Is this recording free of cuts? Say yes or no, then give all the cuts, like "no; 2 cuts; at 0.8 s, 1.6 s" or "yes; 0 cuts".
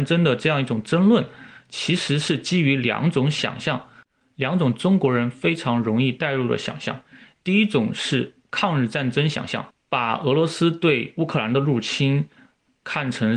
yes; 0 cuts